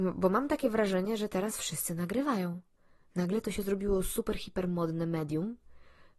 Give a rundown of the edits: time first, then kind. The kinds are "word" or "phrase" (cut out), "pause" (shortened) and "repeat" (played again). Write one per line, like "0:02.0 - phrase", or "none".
none